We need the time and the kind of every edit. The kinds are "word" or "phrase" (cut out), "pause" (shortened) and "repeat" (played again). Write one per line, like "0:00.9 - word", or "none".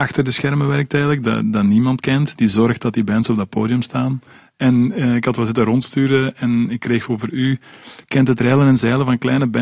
none